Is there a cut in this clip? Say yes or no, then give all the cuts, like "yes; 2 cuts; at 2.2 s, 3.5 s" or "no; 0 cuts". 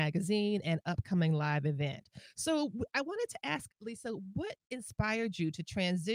yes; 1 cut; at 3.7 s